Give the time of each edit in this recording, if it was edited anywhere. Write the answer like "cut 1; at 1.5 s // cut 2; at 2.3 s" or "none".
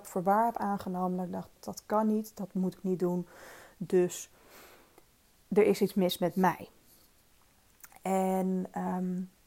cut 1; at 1.6 s